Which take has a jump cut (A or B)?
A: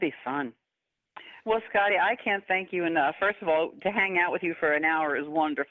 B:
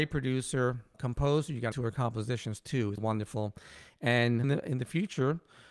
B